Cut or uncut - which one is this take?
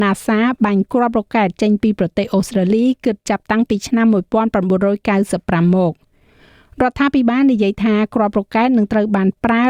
uncut